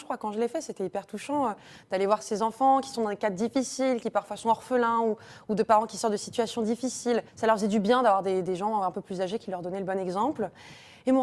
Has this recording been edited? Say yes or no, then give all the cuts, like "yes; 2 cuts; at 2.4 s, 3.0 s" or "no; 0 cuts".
yes; 1 cut; at 7.3 s